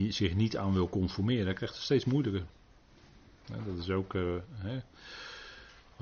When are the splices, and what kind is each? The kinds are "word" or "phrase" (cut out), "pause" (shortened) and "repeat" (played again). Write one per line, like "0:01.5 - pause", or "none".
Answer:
none